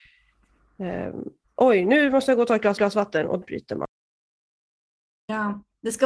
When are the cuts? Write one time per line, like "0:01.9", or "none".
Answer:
0:01.4
0:02.8
0:03.4

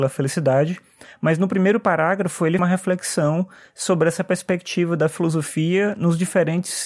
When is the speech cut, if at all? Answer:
0:02.6

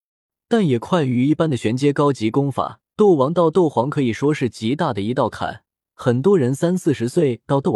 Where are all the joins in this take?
0:02.9
0:05.7

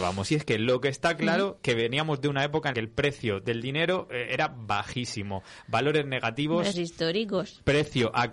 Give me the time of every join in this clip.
0:02.7
0:06.7

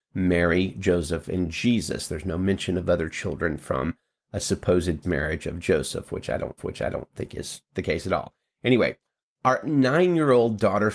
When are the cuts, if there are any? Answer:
0:05.0
0:06.6

